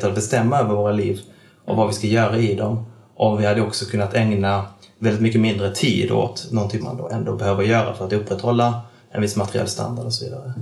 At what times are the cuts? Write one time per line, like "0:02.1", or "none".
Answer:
0:06.8